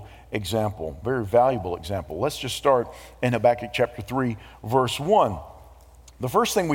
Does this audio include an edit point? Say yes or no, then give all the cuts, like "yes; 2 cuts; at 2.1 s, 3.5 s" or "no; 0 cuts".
no; 0 cuts